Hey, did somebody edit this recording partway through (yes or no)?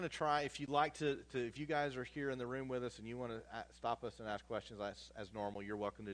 no